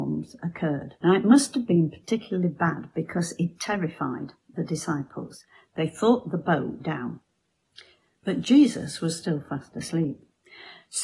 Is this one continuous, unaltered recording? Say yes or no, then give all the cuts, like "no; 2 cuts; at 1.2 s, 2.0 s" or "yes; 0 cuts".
no; 2 cuts; at 1.0 s, 6.8 s